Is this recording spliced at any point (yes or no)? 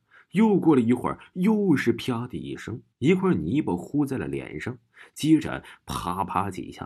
yes